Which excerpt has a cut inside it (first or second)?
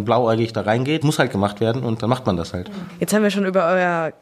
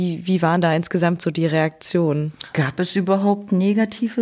first